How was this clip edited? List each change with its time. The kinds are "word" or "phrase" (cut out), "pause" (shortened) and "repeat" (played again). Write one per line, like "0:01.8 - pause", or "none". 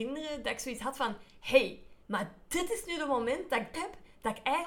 0:02.0 - pause
0:03.7 - word